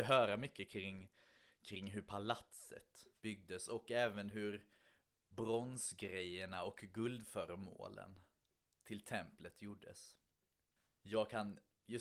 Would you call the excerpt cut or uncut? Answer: uncut